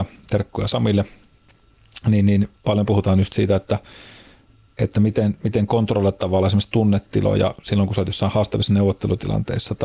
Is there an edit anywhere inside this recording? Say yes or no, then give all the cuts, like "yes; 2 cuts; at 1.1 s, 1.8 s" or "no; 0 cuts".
no; 0 cuts